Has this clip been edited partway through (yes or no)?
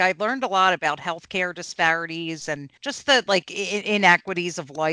yes